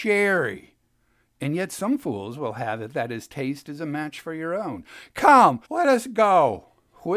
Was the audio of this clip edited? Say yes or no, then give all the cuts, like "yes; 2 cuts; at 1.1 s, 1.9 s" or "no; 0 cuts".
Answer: yes; 1 cut; at 5.6 s